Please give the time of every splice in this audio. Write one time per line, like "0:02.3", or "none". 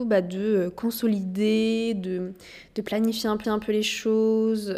0:03.4